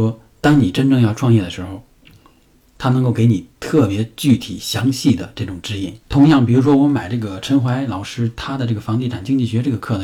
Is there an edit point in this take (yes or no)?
yes